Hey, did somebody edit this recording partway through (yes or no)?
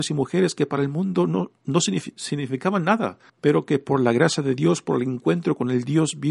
yes